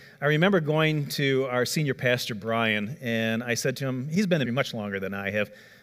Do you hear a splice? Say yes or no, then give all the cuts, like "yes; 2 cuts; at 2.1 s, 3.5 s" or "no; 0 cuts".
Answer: yes; 1 cut; at 4.4 s